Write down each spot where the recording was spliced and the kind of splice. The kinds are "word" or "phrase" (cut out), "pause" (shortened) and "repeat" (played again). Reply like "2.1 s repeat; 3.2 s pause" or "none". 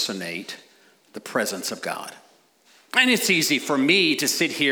2.5 s pause